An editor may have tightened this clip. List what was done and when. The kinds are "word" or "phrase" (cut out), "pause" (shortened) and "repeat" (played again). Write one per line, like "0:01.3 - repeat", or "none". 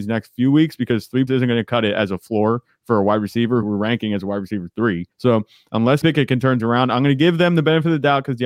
0:01.3 - word
0:03.6 - phrase
0:05.1 - pause
0:06.0 - word
0:06.6 - word